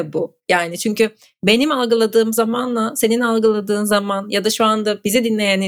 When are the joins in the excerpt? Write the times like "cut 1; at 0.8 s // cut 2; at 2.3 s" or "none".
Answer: none